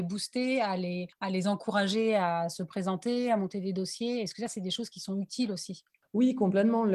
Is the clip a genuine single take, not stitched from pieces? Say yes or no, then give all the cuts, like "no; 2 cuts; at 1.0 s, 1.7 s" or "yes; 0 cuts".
yes; 0 cuts